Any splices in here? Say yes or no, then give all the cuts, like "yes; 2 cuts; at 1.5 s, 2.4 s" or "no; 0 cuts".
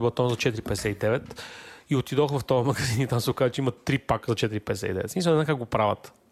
no; 0 cuts